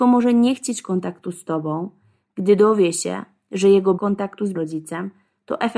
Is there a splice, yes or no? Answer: yes